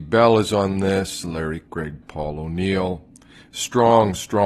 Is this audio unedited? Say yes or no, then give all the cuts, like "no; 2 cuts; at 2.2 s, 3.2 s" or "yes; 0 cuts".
no; 2 cuts; at 1.7 s, 2.0 s